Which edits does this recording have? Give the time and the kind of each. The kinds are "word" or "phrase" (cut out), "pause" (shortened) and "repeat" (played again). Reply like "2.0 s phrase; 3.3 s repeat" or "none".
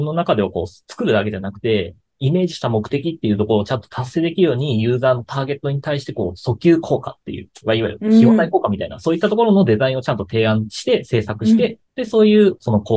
11.9 s pause